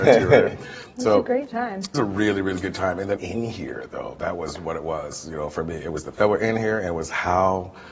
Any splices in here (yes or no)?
yes